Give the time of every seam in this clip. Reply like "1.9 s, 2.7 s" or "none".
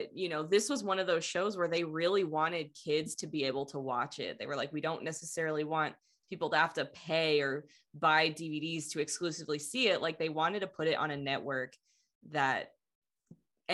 none